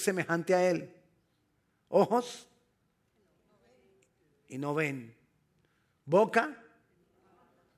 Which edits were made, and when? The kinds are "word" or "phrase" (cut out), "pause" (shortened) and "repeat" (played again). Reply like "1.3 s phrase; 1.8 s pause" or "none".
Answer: none